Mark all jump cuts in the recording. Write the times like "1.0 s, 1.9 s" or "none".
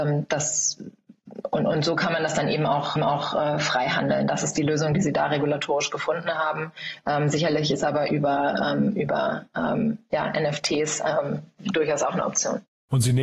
3.0 s